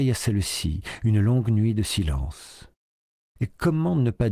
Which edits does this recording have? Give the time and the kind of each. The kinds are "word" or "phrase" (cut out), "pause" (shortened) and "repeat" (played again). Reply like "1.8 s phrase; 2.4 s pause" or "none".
none